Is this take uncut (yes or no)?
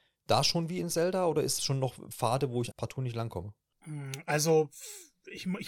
no